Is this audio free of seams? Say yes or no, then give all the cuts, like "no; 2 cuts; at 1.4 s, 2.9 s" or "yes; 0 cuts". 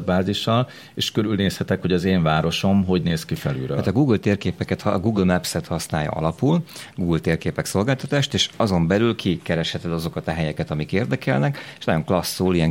yes; 0 cuts